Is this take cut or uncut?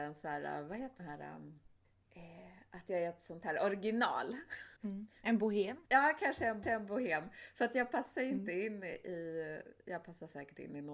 cut